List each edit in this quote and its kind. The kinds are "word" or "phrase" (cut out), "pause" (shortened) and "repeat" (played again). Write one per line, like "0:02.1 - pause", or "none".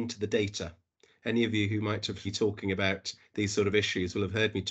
0:02.2 - word